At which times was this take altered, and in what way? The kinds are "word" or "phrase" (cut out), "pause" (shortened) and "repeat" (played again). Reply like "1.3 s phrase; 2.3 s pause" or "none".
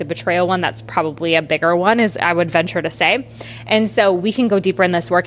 none